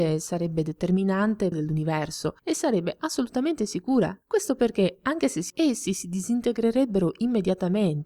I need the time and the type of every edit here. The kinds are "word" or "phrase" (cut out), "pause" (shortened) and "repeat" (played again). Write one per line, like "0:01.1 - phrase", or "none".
0:01.5 - phrase
0:02.4 - pause
0:04.2 - pause
0:05.5 - word

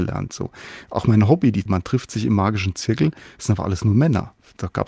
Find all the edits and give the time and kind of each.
0:01.7 - word

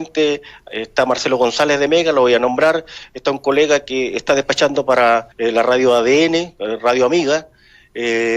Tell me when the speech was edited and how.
0:05.3 - pause

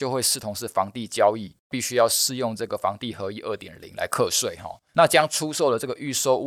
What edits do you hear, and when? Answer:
0:04.9 - pause

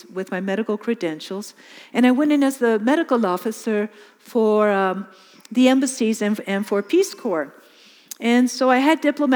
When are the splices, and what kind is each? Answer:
none

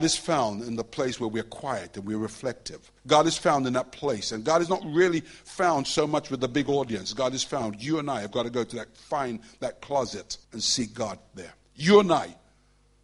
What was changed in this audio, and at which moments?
0:03.0 - pause
0:10.4 - pause
0:11.6 - pause

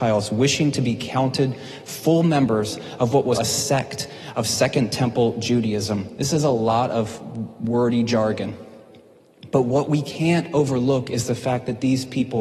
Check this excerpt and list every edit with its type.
0:03.3 - word

